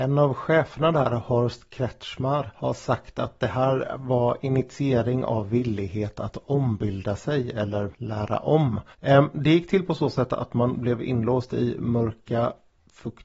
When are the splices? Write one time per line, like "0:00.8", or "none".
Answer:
0:08.9